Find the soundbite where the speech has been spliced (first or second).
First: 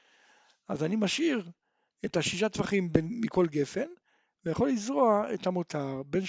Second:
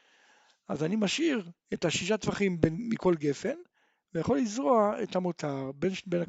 second